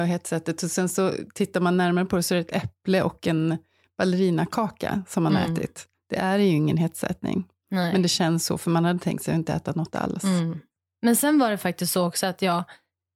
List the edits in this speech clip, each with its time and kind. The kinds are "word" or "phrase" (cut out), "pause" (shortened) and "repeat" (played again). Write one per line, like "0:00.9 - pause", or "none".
none